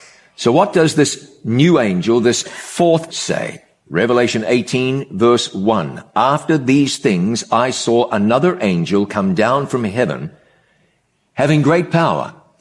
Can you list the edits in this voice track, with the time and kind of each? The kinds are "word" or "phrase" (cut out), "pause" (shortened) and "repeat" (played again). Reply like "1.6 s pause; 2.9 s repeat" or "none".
3.1 s word